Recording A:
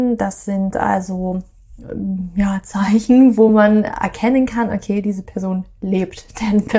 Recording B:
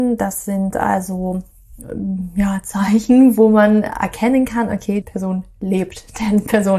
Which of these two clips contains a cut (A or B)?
B